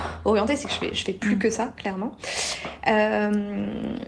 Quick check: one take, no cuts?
yes; 0 cuts

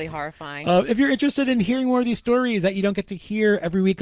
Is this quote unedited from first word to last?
yes; 0 cuts

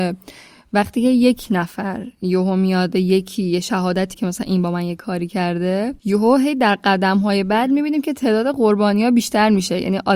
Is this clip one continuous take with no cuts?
no; 2 cuts; at 2.9 s, 4.1 s

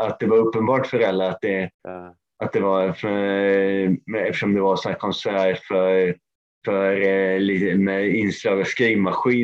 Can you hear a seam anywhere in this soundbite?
yes; 2 cuts; at 1.7 s, 6.4 s

